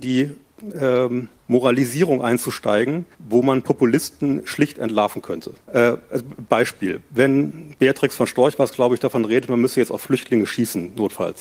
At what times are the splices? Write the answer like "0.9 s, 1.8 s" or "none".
1.4 s, 3.1 s, 5.6 s